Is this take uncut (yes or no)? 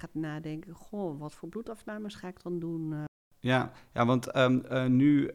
yes